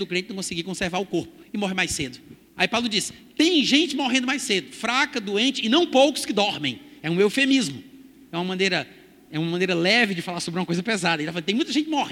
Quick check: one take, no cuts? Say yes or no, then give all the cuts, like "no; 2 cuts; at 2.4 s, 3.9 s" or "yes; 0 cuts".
no; 1 cut; at 2.5 s